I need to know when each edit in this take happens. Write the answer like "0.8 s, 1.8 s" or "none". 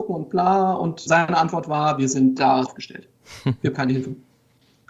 1.1 s, 2.6 s, 3.7 s